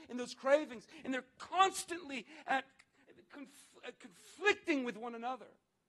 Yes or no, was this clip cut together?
no